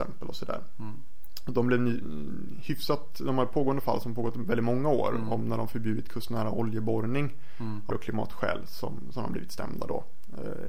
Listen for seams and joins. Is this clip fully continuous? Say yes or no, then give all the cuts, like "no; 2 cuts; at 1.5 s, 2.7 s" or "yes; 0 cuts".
no; 1 cut; at 7.9 s